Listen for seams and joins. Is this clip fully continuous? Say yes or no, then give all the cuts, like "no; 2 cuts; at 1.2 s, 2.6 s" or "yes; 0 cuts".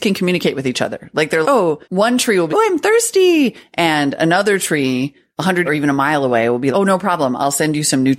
no; 5 cuts; at 1.4 s, 1.8 s, 2.5 s, 5.6 s, 6.7 s